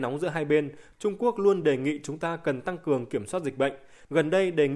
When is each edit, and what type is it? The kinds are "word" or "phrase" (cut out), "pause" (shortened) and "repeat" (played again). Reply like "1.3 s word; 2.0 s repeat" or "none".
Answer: none